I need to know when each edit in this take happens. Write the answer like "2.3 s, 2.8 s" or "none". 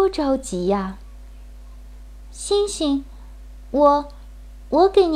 none

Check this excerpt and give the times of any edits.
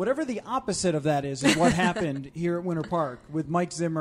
none

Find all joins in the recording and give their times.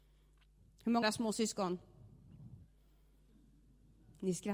1.0 s

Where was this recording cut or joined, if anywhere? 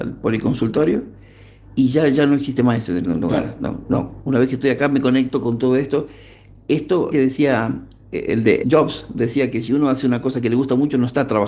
3.9 s, 7.1 s, 8.3 s, 8.6 s

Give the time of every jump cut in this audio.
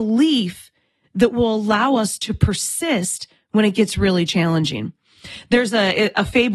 none

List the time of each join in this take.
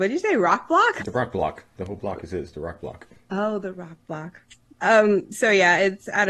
4.5 s

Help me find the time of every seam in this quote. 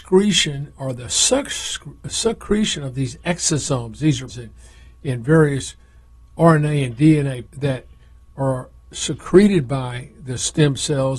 4.3 s, 7.5 s

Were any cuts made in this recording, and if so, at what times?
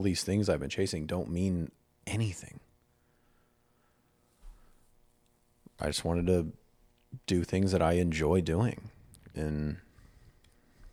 none

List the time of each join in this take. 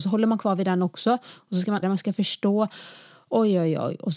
1.8 s

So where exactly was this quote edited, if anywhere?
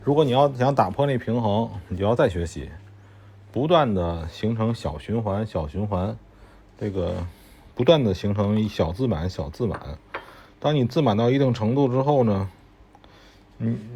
none

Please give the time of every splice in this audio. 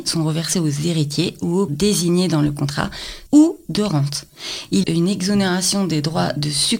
1.7 s, 3.3 s, 4.8 s

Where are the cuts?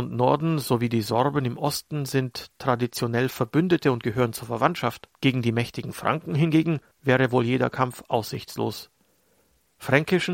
5.1 s, 6.9 s

